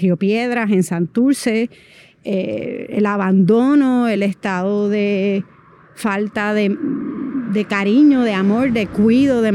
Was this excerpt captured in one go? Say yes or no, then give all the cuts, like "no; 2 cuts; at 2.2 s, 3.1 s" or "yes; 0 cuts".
yes; 0 cuts